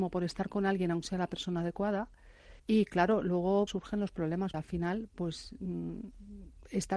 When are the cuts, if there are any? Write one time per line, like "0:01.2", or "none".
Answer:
0:01.0
0:02.6
0:03.7
0:04.5